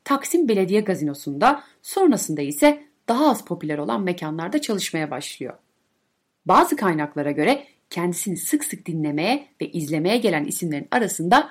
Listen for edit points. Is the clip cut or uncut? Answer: uncut